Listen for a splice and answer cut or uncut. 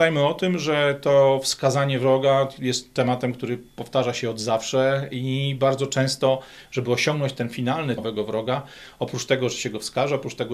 cut